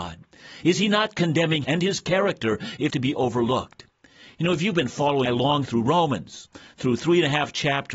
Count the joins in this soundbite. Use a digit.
4